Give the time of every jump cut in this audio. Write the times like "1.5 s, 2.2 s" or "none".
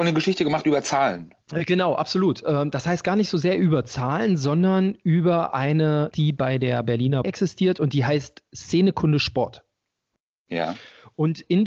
6.1 s, 7.2 s